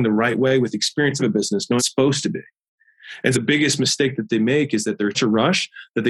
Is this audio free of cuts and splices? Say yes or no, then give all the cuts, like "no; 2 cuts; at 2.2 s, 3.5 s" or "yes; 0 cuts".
no; 4 cuts; at 1.2 s, 1.8 s, 3.3 s, 5.1 s